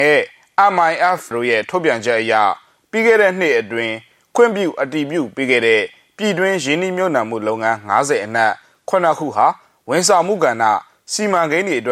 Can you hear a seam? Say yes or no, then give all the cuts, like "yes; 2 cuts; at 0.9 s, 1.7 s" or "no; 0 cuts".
yes; 1 cut; at 1.3 s